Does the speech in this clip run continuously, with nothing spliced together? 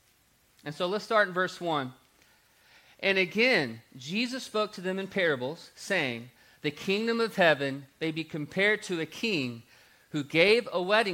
yes; 0 cuts

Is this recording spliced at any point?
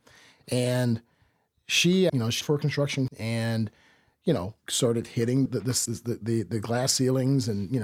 yes; 5 cuts; at 2.1 s, 2.4 s, 3.1 s, 5.5 s, 5.9 s

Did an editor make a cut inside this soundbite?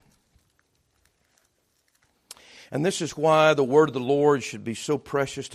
no; 0 cuts

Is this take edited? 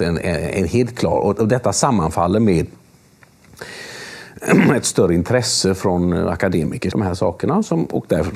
yes; 1 cut; at 6.9 s

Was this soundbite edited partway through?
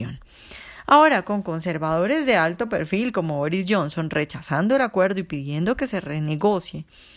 no; 0 cuts

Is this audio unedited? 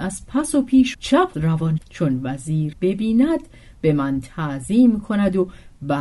no; 4 cuts; at 0.9 s, 1.3 s, 1.8 s, 2.7 s

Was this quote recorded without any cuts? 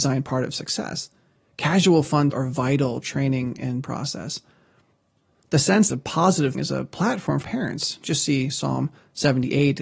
no; 6 cuts; at 2.3 s, 3.0 s, 3.8 s, 5.9 s, 6.5 s, 7.4 s

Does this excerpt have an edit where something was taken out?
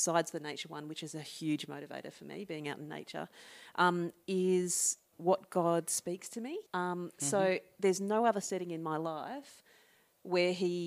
yes; 2 cuts; at 5.1 s, 6.7 s

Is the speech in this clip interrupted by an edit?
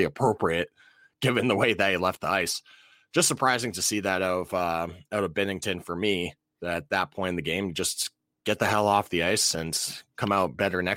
no; 0 cuts

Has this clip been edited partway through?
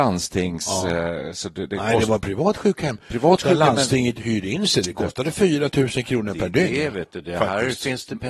no; 0 cuts

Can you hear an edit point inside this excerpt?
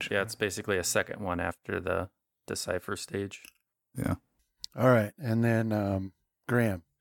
no; 0 cuts

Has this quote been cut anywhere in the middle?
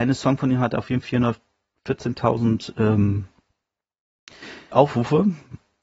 yes; 2 cuts; at 1.0 s, 4.7 s

